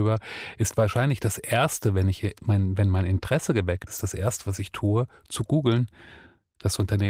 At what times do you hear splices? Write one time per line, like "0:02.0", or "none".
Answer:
0:03.9